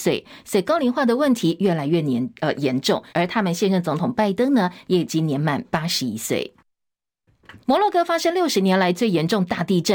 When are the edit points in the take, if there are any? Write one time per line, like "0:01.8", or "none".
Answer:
0:03.1
0:07.6